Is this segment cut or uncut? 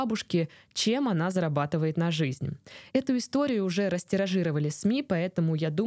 uncut